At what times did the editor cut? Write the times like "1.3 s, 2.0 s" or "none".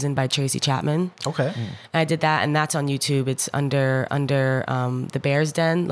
4.1 s